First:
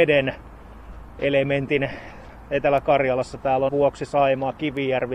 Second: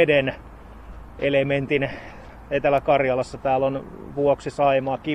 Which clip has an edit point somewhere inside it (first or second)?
first